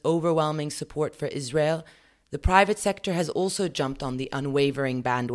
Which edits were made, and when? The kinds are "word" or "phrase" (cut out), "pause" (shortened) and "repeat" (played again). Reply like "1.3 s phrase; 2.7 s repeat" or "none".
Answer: none